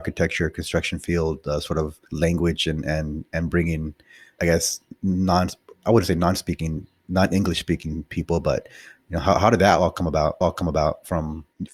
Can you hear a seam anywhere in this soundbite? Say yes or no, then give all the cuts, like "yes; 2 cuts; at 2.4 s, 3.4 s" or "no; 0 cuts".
yes; 3 cuts; at 2.0 s, 4.4 s, 10.4 s